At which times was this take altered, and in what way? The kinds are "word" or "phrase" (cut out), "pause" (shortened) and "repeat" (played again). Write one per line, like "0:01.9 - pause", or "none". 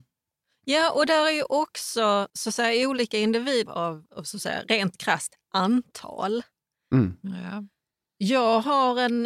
0:02.3 - pause
0:03.7 - phrase